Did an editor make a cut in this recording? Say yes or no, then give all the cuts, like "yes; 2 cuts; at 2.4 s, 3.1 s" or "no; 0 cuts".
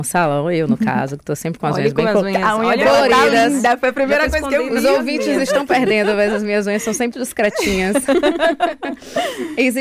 yes; 1 cut; at 7.1 s